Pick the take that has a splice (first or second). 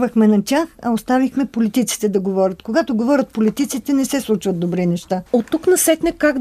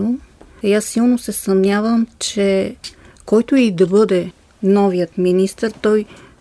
first